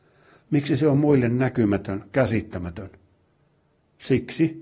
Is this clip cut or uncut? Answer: uncut